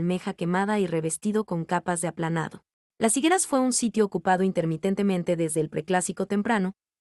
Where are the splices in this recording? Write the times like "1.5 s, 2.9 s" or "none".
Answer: 2.8 s